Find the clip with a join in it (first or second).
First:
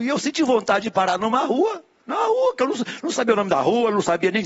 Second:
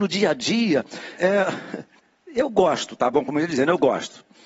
second